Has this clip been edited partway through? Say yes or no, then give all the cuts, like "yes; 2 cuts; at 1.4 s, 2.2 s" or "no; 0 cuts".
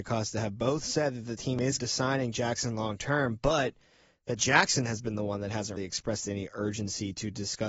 yes; 2 cuts; at 1.8 s, 5.8 s